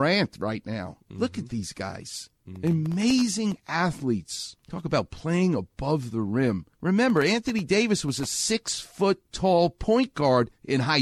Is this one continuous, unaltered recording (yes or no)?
no